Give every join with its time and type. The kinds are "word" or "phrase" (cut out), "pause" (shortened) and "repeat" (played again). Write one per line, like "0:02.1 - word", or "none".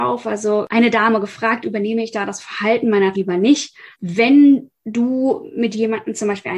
0:03.1 - phrase
0:03.9 - pause